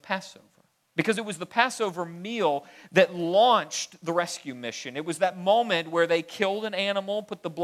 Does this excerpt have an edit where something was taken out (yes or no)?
no